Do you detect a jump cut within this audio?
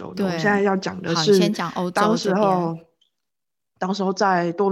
no; 0 cuts

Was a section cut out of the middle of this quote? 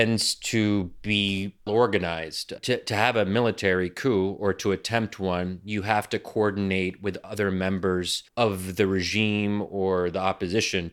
yes; 3 cuts; at 1.7 s, 2.6 s, 8.3 s

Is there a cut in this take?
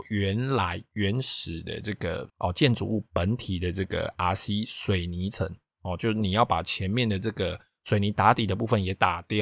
yes; 1 cut; at 2.3 s

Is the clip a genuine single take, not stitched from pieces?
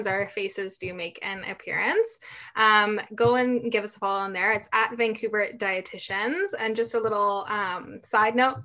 yes; 0 cuts

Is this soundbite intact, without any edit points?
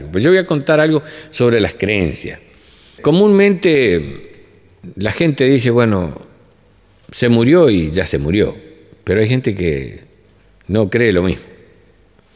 yes; 0 cuts

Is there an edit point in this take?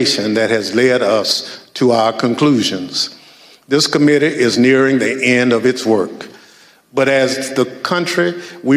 no; 0 cuts

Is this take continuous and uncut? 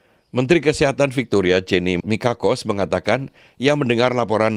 yes; 0 cuts

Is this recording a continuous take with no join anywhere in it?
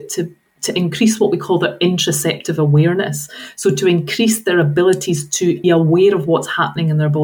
no; 1 cut; at 5.6 s

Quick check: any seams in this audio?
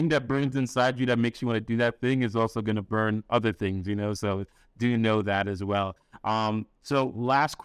no; 0 cuts

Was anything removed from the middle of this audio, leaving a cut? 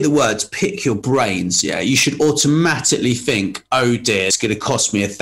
yes; 1 cut; at 4.3 s

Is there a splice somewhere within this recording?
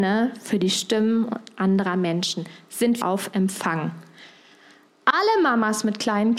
yes; 1 cut; at 3.0 s

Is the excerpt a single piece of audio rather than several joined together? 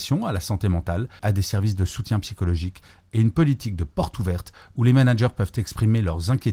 no; 1 cut; at 1.2 s

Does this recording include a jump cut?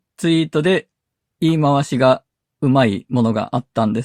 no; 0 cuts

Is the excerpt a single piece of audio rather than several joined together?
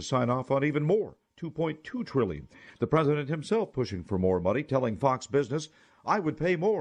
yes; 0 cuts

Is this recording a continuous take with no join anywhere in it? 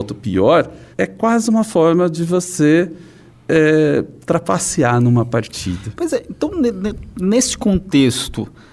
no; 1 cut; at 0.9 s

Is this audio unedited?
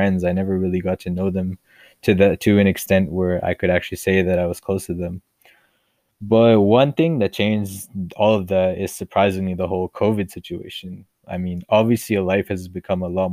yes; 0 cuts

